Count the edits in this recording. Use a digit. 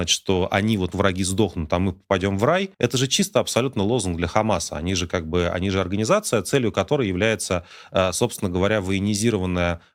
2